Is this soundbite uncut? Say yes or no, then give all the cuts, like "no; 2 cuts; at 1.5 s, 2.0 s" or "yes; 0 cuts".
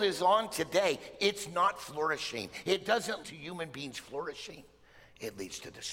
no; 1 cut; at 3.2 s